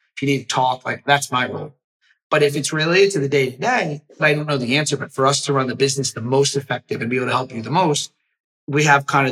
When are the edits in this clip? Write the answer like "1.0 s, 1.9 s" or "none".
4.2 s